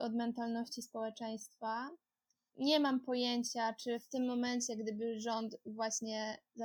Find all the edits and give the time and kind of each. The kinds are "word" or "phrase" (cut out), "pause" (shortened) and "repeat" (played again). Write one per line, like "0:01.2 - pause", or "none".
0:02.5 - word